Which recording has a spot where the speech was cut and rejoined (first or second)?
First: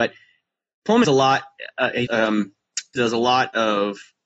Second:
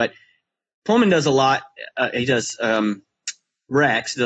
first